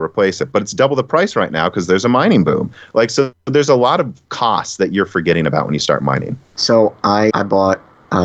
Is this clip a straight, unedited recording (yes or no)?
no